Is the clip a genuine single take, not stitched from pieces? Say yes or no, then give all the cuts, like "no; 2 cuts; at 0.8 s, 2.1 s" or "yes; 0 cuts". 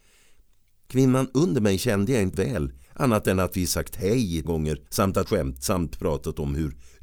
no; 5 cuts; at 2.3 s, 2.8 s, 4.4 s, 4.9 s, 5.3 s